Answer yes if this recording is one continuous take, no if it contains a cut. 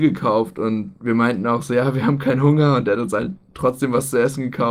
yes